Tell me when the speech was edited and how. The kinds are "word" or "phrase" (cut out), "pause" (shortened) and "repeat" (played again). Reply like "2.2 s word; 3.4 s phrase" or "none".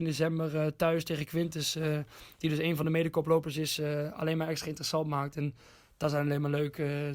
none